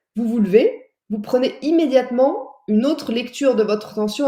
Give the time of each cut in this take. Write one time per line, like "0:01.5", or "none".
none